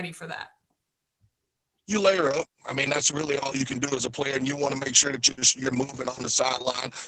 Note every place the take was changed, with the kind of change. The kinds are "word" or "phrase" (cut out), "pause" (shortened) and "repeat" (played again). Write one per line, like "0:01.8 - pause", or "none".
none